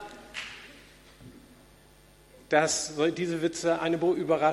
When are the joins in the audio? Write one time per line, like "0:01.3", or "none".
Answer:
none